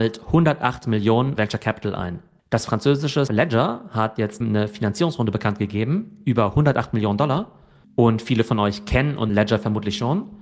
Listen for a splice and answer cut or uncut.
cut